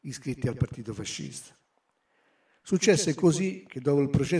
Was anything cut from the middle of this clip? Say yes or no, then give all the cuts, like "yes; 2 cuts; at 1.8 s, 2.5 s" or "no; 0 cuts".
no; 0 cuts